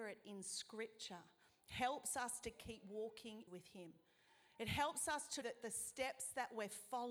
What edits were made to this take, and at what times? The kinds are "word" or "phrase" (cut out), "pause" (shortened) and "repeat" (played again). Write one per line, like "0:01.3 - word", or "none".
0:03.5 - phrase
0:05.4 - word